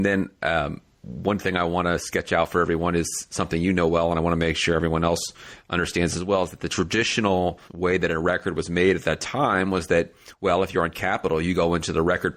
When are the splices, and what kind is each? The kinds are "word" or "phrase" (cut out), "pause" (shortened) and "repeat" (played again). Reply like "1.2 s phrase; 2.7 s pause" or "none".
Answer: 7.7 s pause